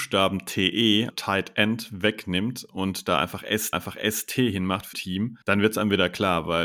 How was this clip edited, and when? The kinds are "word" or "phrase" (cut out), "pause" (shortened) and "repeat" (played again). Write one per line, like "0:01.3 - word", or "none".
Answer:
0:01.1 - word
0:03.7 - repeat
0:04.9 - word
0:05.4 - pause

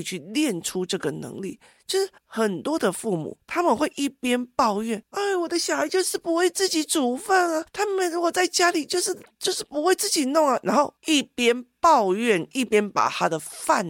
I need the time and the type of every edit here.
0:02.2 - pause
0:11.0 - pause

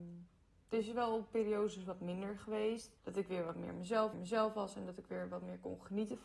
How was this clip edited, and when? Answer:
0:03.0 - pause
0:04.1 - repeat

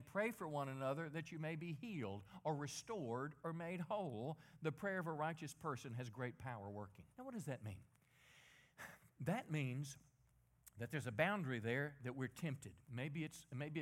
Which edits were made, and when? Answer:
0:07.1 - pause
0:12.8 - pause

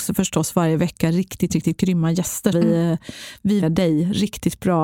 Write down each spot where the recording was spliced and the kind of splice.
0:02.5 - word
0:03.6 - phrase

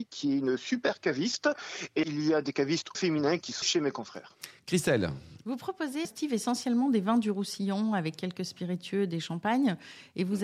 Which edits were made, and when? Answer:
0:02.0 - word
0:02.9 - word
0:03.6 - word
0:06.0 - word

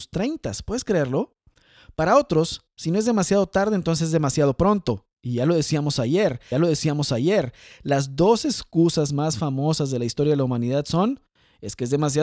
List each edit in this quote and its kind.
0:05.1 - pause
0:06.5 - repeat

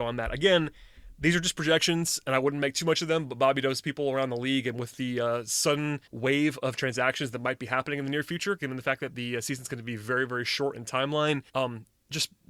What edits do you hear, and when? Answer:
0:06.1 - pause
0:11.5 - pause

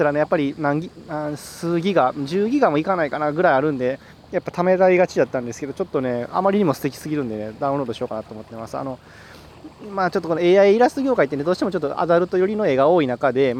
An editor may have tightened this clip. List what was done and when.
none

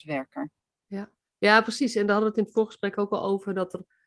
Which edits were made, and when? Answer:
0:01.2 - pause

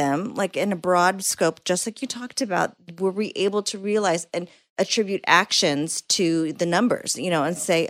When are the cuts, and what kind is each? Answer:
none

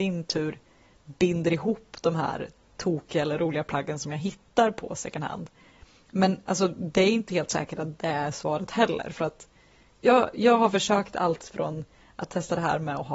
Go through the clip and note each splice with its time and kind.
none

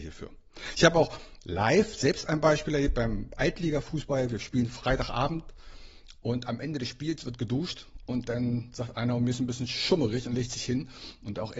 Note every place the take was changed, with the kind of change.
none

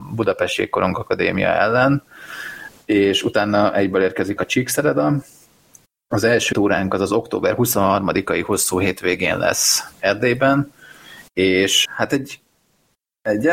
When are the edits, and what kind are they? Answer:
0:04.4 - word
0:06.5 - word
0:10.0 - word
0:11.8 - word

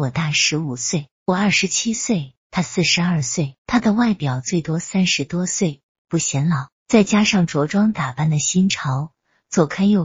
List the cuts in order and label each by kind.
0:01.2 - pause
0:02.4 - pause
0:03.6 - pause
0:06.8 - pause

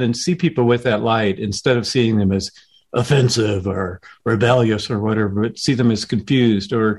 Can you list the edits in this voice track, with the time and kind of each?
none

